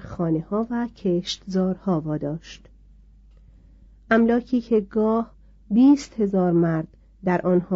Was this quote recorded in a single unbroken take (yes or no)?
yes